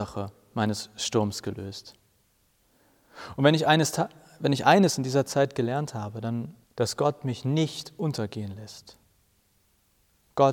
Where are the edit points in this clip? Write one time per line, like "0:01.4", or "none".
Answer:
0:06.6